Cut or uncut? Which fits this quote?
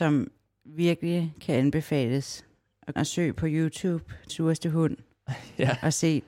cut